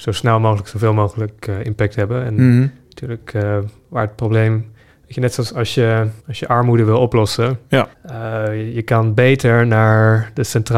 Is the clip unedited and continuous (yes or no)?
no